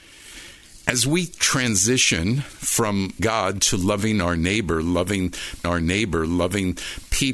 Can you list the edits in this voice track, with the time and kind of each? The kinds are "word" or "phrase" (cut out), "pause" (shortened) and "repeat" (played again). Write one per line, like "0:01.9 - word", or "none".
0:03.2 - word
0:05.6 - repeat